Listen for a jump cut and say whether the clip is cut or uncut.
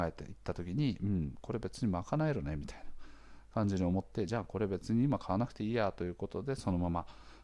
uncut